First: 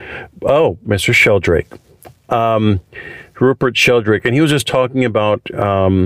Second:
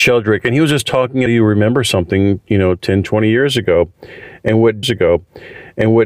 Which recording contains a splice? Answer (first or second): second